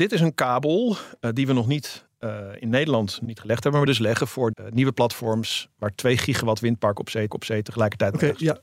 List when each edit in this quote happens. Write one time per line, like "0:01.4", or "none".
0:02.6
0:03.3
0:03.9
0:04.5
0:07.3